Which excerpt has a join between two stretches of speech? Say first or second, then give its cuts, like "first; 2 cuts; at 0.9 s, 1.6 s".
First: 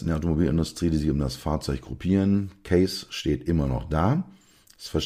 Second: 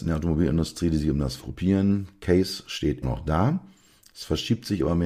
second; 2 cuts; at 1.4 s, 3.0 s